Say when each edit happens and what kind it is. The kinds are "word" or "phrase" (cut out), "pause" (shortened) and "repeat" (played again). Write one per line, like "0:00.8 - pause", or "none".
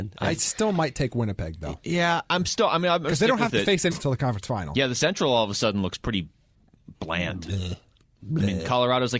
0:03.9 - phrase
0:06.9 - word